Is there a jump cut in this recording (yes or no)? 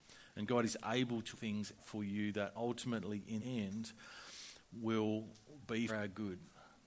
yes